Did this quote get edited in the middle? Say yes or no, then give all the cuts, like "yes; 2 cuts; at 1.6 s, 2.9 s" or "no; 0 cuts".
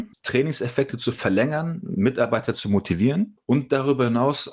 no; 0 cuts